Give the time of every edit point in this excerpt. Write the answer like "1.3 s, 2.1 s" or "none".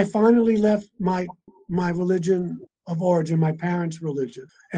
none